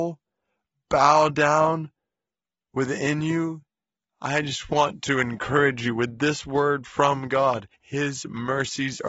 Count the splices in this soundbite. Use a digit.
1